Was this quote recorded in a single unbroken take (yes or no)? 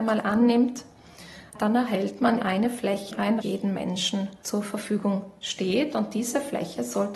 no